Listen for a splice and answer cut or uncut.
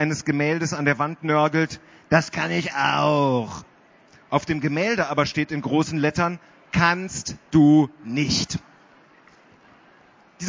uncut